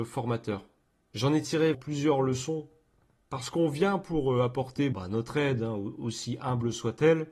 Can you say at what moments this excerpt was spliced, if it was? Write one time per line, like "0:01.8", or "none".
0:01.7
0:04.9